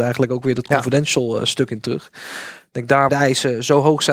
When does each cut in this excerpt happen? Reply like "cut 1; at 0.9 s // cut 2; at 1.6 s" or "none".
cut 1; at 3.1 s